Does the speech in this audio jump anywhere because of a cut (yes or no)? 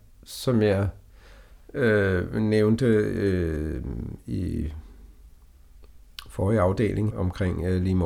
yes